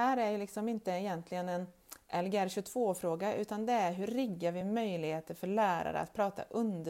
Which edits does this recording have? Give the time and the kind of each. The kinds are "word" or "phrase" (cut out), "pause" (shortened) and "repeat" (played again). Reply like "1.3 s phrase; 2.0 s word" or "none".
none